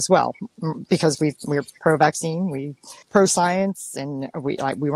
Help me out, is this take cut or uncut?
cut